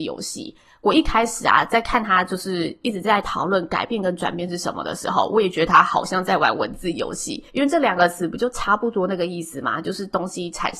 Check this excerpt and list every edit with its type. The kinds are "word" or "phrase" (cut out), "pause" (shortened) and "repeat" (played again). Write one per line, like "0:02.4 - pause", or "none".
0:07.5 - pause